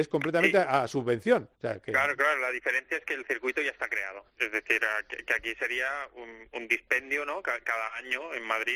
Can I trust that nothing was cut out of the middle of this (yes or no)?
no